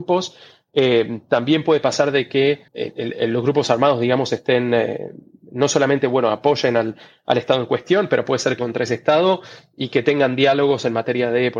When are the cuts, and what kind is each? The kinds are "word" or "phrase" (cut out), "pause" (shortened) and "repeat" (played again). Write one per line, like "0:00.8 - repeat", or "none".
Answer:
0:02.7 - pause
0:08.6 - phrase